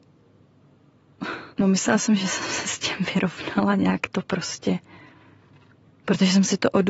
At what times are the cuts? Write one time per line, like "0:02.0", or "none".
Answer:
0:01.5